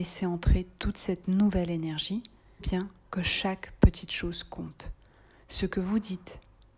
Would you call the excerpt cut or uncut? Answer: cut